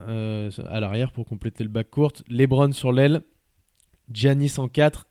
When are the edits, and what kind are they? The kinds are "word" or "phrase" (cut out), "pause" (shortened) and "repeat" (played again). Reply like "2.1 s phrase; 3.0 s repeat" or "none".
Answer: none